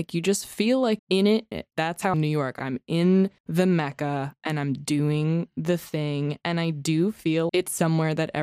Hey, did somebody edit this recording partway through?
yes; 5 cuts; at 1.0 s, 1.5 s, 2.1 s, 3.4 s, 7.5 s

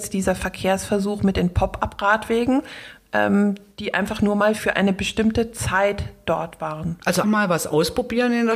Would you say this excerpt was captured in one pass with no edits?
no; 1 cut; at 7.2 s

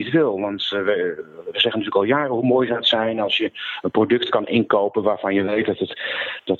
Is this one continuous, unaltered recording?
yes; 0 cuts

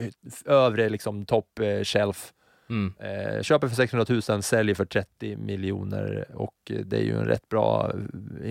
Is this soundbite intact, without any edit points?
yes; 0 cuts

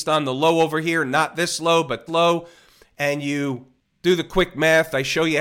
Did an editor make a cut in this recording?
yes; 1 cut; at 2.1 s

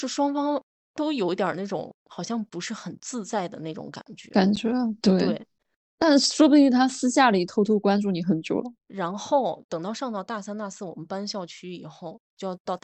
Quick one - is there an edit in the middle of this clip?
yes; 1 cut; at 8.8 s

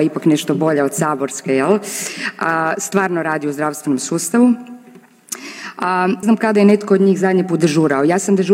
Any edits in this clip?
yes; 1 cut; at 6.2 s

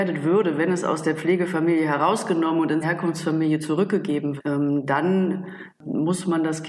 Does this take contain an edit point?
yes; 2 cuts; at 2.8 s, 4.4 s

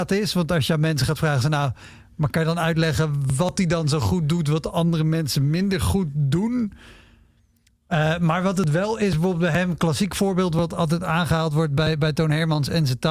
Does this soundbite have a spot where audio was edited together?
no; 0 cuts

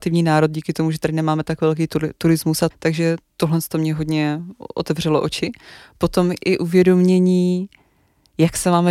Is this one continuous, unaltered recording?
no; 1 cut; at 2.7 s

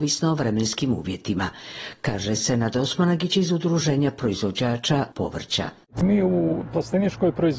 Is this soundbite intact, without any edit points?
yes; 0 cuts

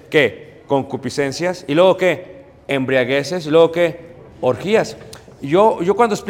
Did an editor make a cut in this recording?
no; 0 cuts

